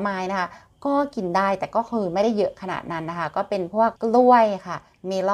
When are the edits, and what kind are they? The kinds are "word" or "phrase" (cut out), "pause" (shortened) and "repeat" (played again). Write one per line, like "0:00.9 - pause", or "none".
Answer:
0:04.0 - pause